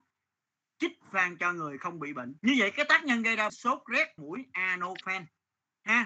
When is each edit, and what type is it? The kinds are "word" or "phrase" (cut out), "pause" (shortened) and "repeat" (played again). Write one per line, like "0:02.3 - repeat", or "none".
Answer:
0:02.4 - pause
0:03.5 - word
0:04.2 - phrase